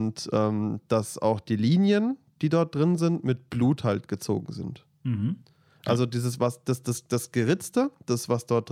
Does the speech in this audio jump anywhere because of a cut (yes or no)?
no